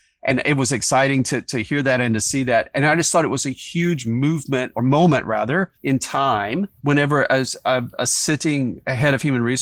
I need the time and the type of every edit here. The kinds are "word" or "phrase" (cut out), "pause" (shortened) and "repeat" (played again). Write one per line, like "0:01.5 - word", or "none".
0:05.7 - pause
0:06.8 - pause